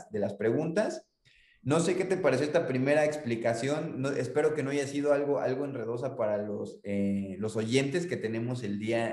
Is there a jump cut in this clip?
no; 0 cuts

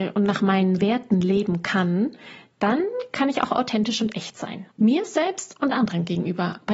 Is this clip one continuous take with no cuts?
no; 1 cut; at 4.7 s

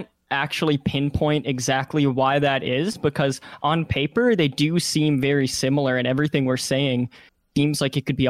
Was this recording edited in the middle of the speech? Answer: no; 0 cuts

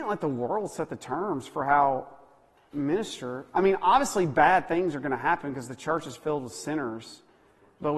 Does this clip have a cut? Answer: yes; 1 cut; at 2.7 s

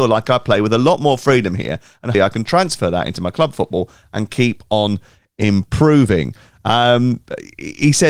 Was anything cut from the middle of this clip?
yes; 1 cut; at 2.1 s

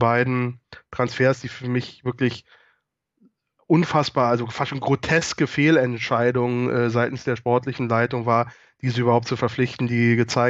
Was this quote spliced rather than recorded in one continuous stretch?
no; 0 cuts

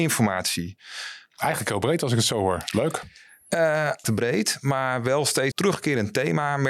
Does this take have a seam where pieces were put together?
yes; 2 cuts; at 4.0 s, 5.5 s

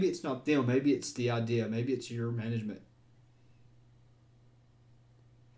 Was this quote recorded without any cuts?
yes; 0 cuts

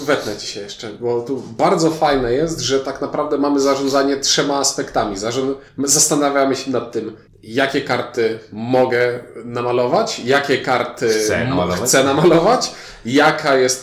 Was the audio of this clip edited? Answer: yes; 2 cuts; at 5.7 s, 7.3 s

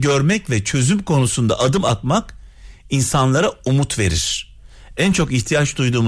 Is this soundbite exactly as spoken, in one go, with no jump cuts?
yes; 0 cuts

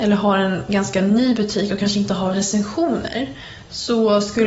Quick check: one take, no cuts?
no; 1 cut; at 2.3 s

